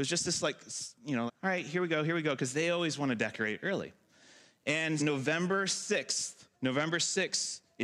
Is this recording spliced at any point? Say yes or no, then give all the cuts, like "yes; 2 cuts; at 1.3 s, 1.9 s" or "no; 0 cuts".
yes; 3 cuts; at 1.3 s, 5.0 s, 6.5 s